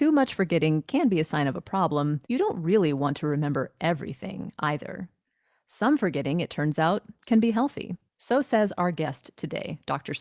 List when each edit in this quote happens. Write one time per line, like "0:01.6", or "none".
0:02.2
0:08.1